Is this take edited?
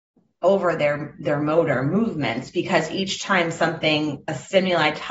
no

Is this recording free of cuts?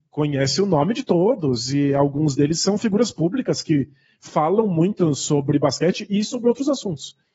yes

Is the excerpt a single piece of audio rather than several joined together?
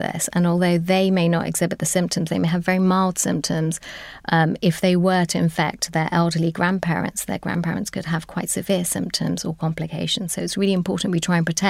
yes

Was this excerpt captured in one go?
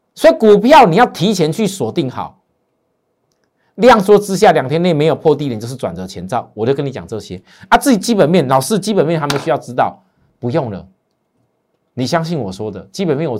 yes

